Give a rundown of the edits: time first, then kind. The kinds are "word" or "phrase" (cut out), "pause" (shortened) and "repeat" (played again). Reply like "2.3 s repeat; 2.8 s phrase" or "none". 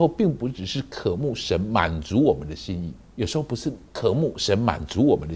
3.1 s pause; 3.9 s pause